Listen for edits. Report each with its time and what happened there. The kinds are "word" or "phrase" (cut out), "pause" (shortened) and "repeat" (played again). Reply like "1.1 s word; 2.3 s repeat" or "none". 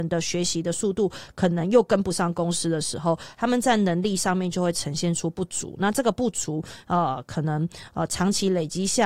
none